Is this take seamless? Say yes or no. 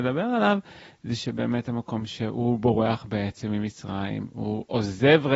yes